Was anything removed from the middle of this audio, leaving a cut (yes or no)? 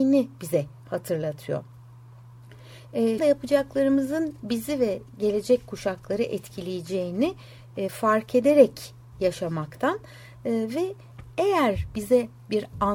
yes